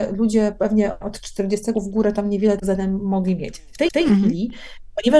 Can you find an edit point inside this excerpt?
yes; 3 cuts; at 1.7 s, 2.6 s, 3.9 s

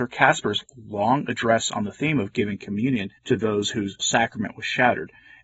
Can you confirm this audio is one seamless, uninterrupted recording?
no; 2 cuts; at 3.2 s, 4.0 s

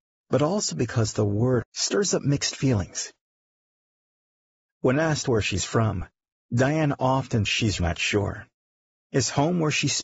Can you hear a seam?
yes; 3 cuts; at 1.6 s, 7.5 s, 7.8 s

